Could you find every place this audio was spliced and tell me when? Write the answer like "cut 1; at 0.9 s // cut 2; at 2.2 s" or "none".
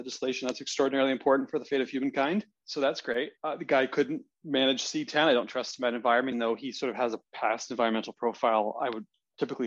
cut 1; at 3.4 s // cut 2; at 6.3 s

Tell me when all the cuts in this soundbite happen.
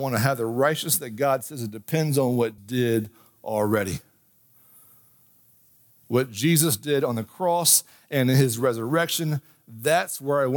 cut 1; at 2.6 s

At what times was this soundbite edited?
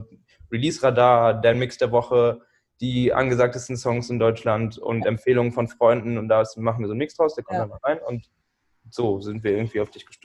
none

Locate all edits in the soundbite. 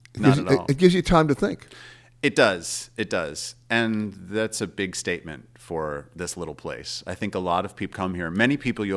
cut 1; at 7.9 s

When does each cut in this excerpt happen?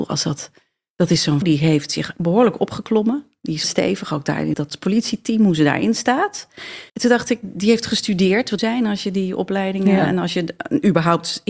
cut 1; at 1.4 s // cut 2; at 3.6 s // cut 3; at 4.5 s // cut 4; at 6.9 s // cut 5; at 8.6 s

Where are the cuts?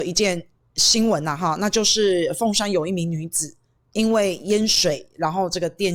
none

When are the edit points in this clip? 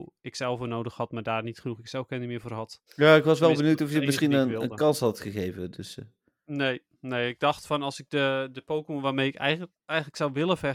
cut 1; at 2.9 s

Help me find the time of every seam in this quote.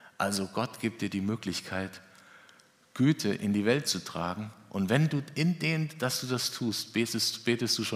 none

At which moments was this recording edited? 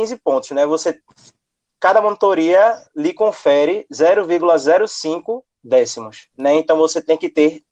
cut 1; at 6.3 s

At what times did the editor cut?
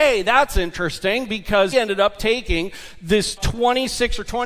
cut 1; at 1.7 s // cut 2; at 3.4 s

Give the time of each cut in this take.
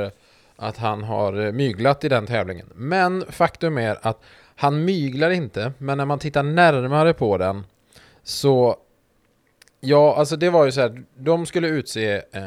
none

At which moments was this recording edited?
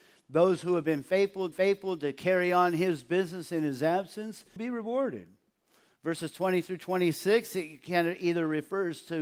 cut 1; at 1.5 s // cut 2; at 4.6 s

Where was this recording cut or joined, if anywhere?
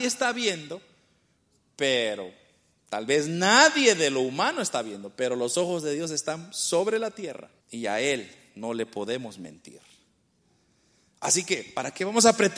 cut 1; at 7.6 s

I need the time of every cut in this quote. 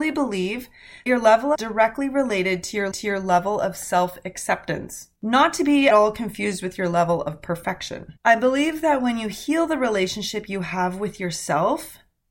cut 1; at 1.1 s // cut 2; at 1.5 s // cut 3; at 2.9 s // cut 4; at 5.2 s // cut 5; at 5.9 s // cut 6; at 8.2 s

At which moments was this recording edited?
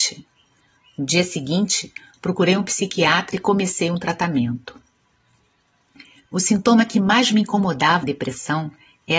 cut 1; at 8.0 s

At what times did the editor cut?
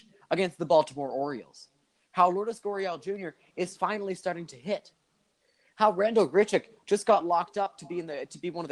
none

